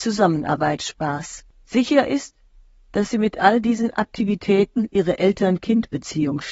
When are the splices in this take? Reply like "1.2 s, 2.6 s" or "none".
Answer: none